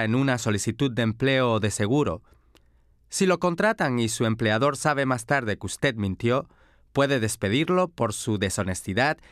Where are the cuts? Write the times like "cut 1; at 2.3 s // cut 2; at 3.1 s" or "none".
none